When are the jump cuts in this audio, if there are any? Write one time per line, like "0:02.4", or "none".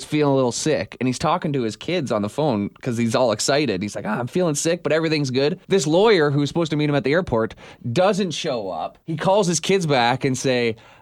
0:05.6
0:09.0